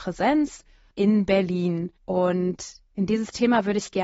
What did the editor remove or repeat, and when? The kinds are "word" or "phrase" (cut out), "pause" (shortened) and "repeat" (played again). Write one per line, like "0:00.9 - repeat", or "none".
0:02.0 - pause